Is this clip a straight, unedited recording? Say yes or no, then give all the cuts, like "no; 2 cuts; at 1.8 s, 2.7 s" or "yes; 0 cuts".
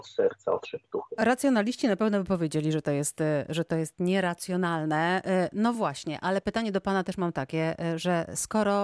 yes; 0 cuts